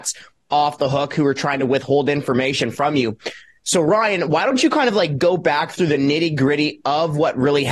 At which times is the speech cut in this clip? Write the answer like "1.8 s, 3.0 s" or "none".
none

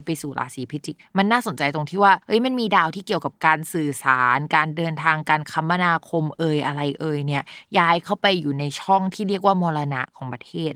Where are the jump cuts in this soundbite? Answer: 2.2 s

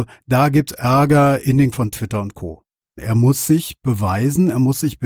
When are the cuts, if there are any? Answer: 1.7 s

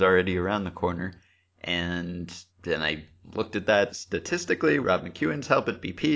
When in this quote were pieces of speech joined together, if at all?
2.5 s, 4.8 s

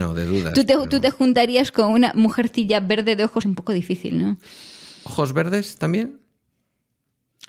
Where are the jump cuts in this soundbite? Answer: 3.4 s

